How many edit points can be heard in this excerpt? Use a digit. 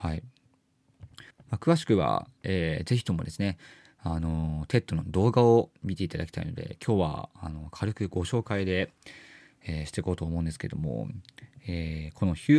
1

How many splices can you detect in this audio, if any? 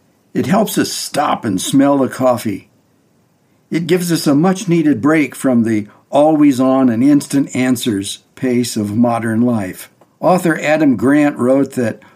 1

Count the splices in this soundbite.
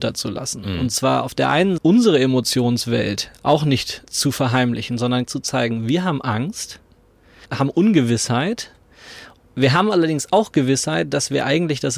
4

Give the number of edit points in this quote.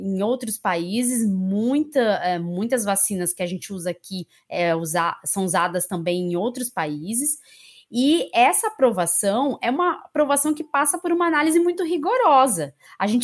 0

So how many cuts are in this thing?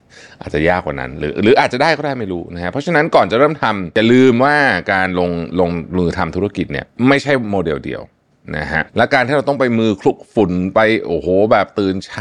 1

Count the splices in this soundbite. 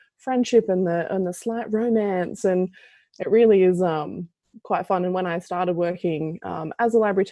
0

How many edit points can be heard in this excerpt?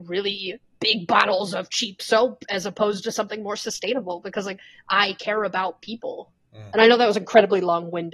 1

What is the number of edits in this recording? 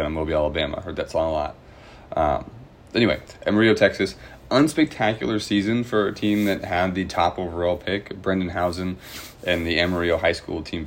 0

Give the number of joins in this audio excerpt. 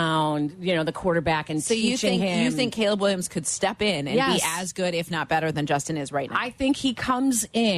0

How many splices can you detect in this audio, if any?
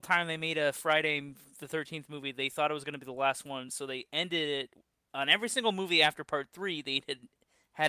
0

